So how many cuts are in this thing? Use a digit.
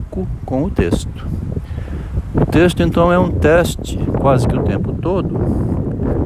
0